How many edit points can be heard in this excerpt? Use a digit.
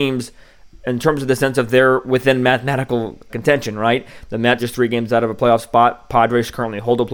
2